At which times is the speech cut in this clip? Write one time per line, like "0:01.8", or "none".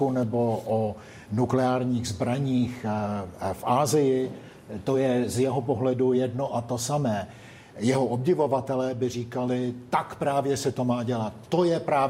none

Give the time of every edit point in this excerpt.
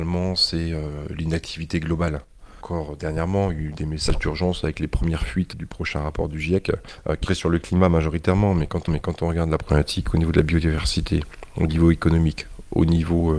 0:05.5
0:07.3
0:08.9

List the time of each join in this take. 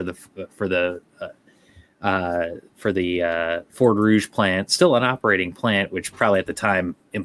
none

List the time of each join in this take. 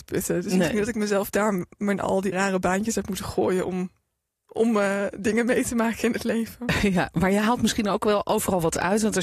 0:02.3

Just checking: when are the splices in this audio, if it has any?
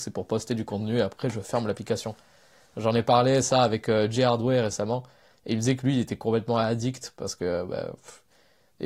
none

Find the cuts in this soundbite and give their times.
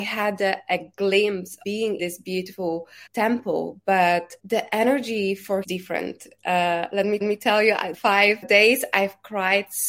0:01.6
0:02.0
0:03.1
0:04.4
0:05.6
0:07.2
0:07.9
0:08.4

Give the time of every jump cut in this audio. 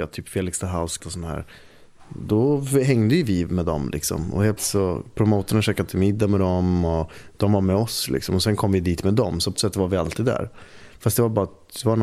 0:01.0
0:04.6
0:09.6

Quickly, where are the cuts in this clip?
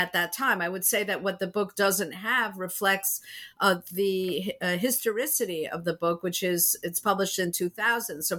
none

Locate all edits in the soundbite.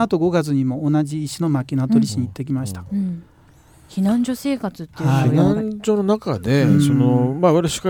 none

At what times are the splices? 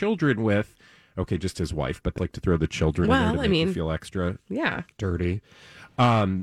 0:02.2

